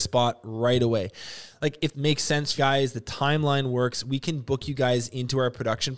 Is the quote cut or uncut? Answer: cut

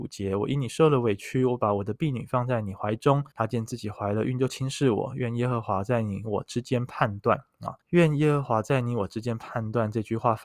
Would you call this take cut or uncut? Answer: cut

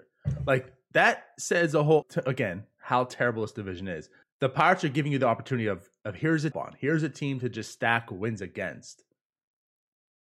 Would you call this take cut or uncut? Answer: cut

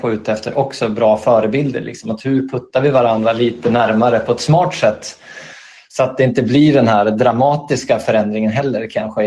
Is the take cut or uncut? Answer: uncut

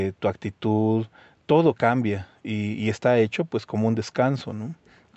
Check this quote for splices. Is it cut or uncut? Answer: uncut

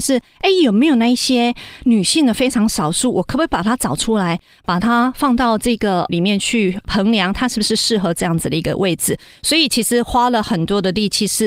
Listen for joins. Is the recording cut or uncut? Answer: cut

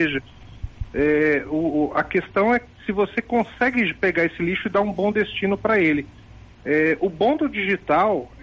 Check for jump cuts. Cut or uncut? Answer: uncut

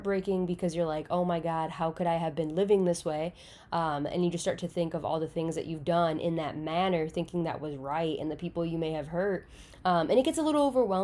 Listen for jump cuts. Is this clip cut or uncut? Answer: uncut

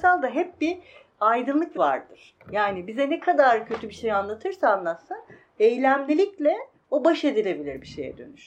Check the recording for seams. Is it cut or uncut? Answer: cut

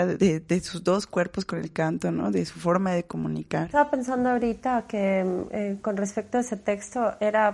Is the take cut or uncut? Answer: uncut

